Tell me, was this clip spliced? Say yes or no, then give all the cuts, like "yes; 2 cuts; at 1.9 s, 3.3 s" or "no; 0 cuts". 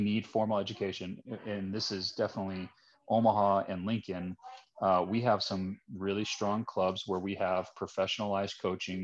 no; 0 cuts